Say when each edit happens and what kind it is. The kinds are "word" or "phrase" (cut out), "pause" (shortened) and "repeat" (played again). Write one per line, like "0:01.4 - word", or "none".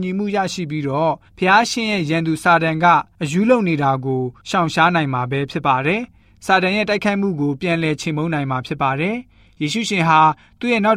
0:01.3 - pause